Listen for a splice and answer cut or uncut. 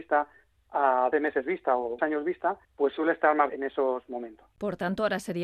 cut